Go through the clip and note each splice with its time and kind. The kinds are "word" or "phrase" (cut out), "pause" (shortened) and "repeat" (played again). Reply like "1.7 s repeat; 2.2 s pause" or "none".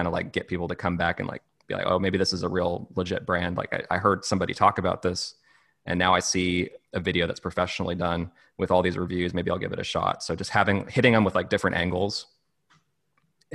8.4 s pause